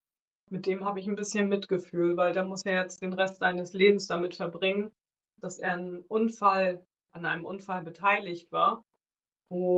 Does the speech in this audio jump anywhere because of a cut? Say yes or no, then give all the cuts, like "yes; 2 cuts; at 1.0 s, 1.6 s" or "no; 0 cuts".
no; 0 cuts